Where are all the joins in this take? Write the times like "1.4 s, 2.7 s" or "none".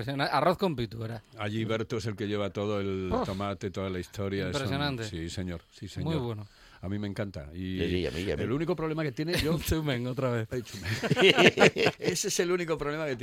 none